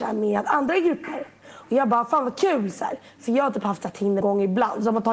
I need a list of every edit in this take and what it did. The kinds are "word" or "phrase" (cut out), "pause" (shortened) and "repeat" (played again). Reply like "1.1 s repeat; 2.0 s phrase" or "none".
4.2 s word